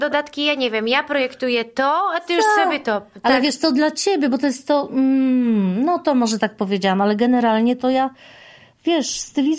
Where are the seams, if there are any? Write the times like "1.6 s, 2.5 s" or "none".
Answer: none